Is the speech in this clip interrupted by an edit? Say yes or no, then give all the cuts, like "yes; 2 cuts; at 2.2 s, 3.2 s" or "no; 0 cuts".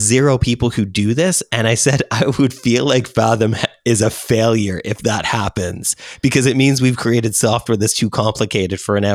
no; 0 cuts